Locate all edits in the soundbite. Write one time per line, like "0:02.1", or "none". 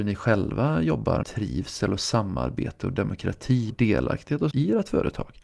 0:01.2
0:03.7
0:04.5